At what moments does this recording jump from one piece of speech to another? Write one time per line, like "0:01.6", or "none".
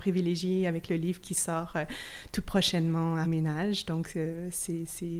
0:03.2